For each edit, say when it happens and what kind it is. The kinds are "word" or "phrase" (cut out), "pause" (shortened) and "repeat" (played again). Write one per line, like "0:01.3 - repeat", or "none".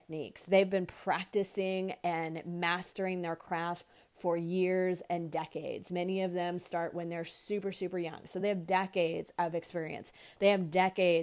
none